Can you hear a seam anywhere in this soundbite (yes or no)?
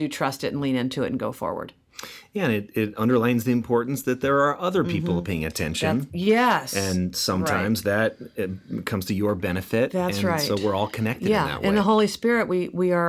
no